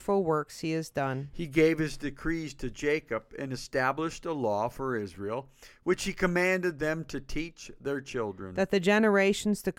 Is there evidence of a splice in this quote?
no; 0 cuts

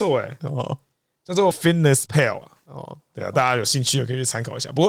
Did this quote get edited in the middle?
yes; 1 cut; at 1.5 s

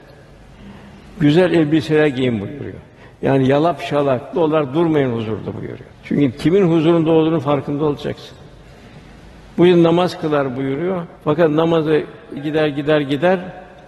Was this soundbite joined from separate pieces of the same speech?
yes; 4 cuts; at 4.3 s, 5.9 s, 11.2 s, 12.4 s

